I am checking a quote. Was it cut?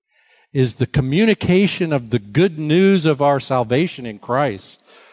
no; 0 cuts

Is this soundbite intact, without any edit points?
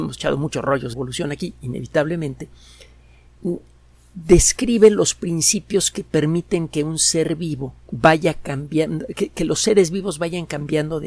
no; 2 cuts; at 0.9 s, 7.8 s

